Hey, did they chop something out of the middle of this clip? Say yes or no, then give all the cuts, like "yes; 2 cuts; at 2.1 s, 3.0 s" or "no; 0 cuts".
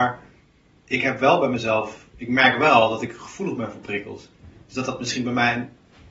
yes; 1 cut; at 2.1 s